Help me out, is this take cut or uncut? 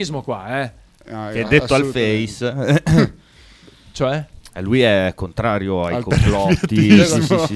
uncut